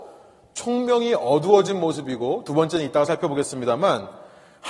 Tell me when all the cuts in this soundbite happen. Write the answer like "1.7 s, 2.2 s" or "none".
none